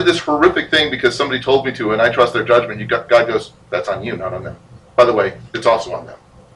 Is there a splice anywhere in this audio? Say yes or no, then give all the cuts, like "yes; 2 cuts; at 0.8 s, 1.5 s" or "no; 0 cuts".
no; 0 cuts